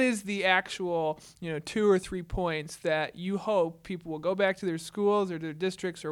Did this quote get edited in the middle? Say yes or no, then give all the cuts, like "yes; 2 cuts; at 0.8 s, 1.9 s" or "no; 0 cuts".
no; 0 cuts